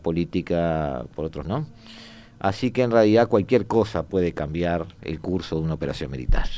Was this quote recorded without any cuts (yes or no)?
no